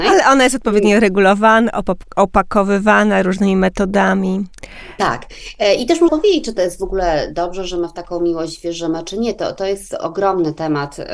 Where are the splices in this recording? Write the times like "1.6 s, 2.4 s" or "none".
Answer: 6.1 s